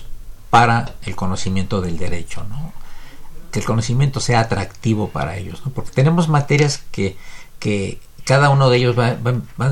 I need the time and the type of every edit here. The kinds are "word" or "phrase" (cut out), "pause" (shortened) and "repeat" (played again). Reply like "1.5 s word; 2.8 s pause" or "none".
none